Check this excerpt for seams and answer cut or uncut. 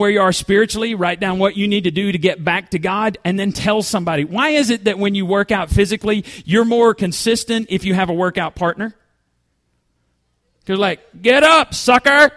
uncut